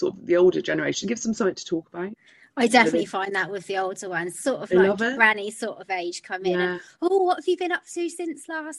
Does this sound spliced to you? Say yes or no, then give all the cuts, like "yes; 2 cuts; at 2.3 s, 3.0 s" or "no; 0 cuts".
no; 0 cuts